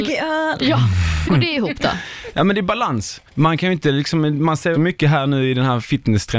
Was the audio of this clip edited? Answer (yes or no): yes